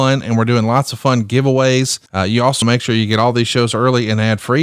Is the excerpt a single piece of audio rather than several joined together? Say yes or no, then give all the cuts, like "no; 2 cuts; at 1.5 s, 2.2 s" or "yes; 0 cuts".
no; 2 cuts; at 2.1 s, 2.6 s